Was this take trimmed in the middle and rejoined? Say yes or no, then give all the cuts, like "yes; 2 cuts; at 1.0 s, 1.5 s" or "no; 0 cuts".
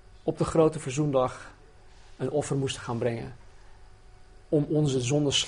no; 0 cuts